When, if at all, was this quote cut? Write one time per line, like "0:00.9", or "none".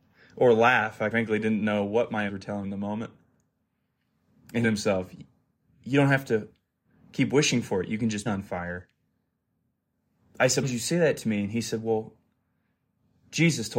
0:01.1
0:02.3
0:02.6
0:04.6
0:08.3
0:10.6